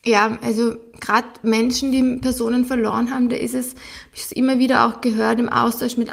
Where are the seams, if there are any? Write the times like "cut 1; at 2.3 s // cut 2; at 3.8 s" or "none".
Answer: none